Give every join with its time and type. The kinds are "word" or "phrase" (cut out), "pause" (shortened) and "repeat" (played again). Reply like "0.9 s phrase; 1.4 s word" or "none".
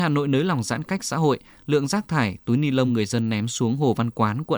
none

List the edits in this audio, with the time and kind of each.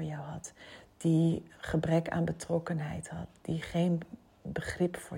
none

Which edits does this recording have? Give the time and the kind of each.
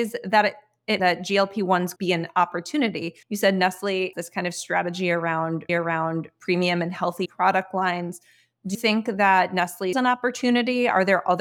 1.0 s phrase; 2.0 s word; 3.2 s pause; 4.1 s word; 5.7 s repeat; 7.3 s word; 8.7 s word; 9.9 s phrase

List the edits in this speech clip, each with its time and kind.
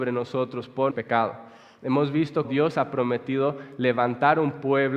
0.9 s word; 2.4 s word

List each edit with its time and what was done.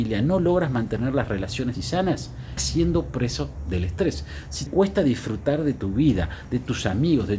1.7 s word; 2.6 s word; 4.7 s word

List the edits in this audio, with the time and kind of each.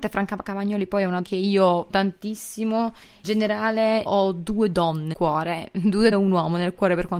1.2 s word; 1.9 s word; 3.2 s word; 4.1 s word; 5.1 s word; 6.1 s word

